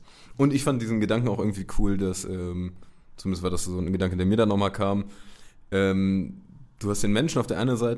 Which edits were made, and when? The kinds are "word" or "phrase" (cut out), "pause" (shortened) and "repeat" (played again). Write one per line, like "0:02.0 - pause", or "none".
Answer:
none